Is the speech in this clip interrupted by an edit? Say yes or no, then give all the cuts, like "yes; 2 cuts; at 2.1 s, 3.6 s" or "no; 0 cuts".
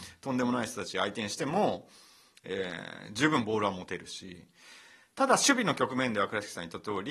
no; 0 cuts